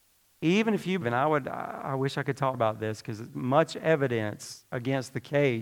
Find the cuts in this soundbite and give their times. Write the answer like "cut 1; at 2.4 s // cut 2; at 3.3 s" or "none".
cut 1; at 1.0 s // cut 2; at 2.5 s // cut 3; at 3.3 s